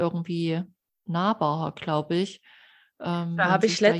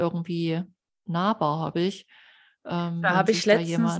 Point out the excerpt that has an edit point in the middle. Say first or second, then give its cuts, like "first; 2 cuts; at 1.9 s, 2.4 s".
second; 1 cut; at 1.7 s